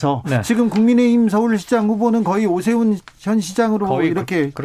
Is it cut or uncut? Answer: uncut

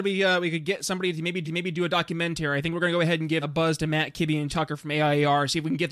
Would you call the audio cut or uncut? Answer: cut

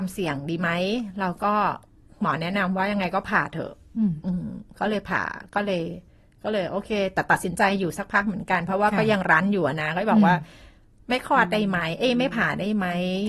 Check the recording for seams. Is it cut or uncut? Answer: uncut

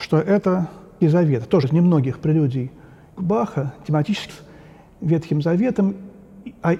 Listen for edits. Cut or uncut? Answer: cut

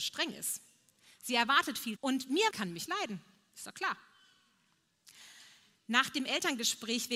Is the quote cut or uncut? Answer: cut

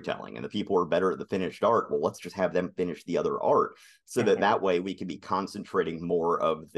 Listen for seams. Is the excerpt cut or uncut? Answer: uncut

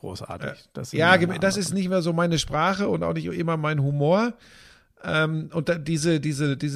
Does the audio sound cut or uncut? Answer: uncut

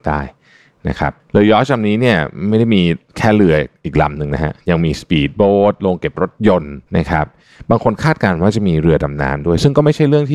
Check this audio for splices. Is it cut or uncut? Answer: cut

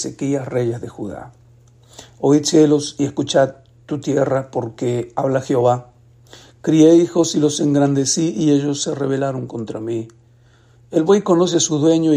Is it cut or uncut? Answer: uncut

